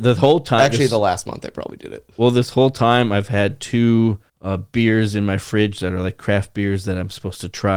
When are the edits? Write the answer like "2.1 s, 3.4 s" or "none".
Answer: 4.3 s